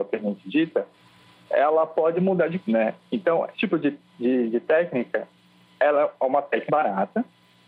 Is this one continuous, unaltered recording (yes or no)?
no